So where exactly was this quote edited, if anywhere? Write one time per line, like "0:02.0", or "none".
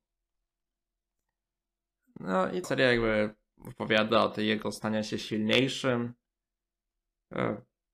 0:02.6
0:04.6